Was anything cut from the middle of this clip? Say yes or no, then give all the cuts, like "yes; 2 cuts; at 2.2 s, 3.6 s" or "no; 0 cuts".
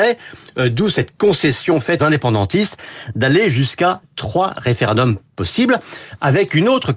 yes; 1 cut; at 2.0 s